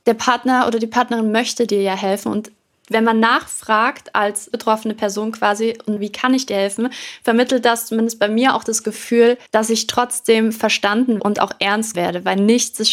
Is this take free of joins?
no; 6 cuts; at 2.6 s, 4.5 s, 6.0 s, 9.5 s, 11.2 s, 11.9 s

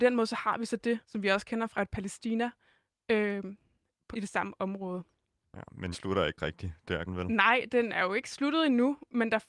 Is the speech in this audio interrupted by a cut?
yes; 5 cuts; at 1.0 s, 1.7 s, 4.1 s, 5.9 s, 7.1 s

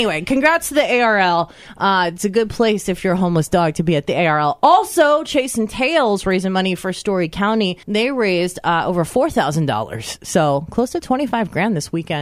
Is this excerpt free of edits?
no; 1 cut; at 7.8 s

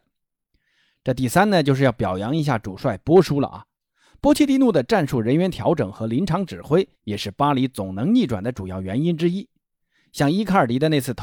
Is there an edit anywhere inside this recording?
yes; 1 cut; at 7.0 s

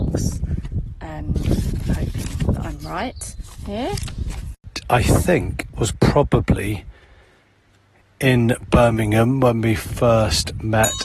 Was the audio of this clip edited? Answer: no; 0 cuts

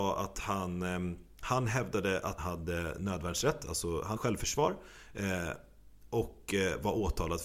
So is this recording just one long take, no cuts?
no; 2 cuts; at 2.4 s, 4.2 s

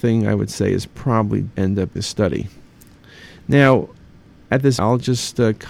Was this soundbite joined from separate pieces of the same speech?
yes; 3 cuts; at 1.5 s, 2.0 s, 4.8 s

